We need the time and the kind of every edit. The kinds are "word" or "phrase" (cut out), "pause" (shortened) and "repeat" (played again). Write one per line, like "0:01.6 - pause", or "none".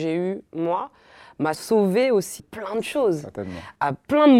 0:01.5 - word
0:02.4 - word